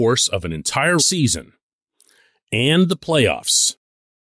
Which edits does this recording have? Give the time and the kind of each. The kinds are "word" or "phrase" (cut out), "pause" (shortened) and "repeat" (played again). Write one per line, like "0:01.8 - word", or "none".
0:01.0 - word